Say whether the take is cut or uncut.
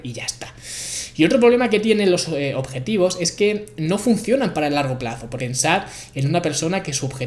cut